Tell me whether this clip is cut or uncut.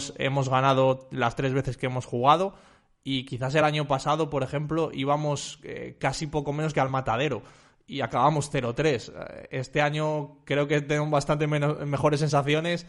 uncut